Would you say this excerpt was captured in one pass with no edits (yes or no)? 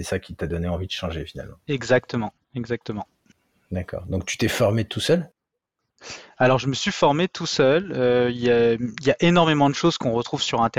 yes